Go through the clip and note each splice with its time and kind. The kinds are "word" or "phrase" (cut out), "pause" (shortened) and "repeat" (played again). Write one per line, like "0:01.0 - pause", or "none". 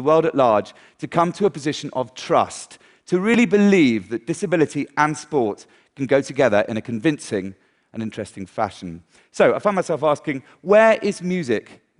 none